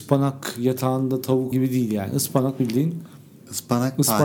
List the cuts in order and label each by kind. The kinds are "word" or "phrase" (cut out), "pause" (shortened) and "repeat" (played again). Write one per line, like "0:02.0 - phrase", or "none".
0:01.5 - word